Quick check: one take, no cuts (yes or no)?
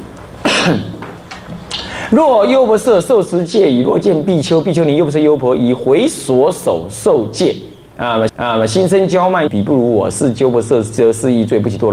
no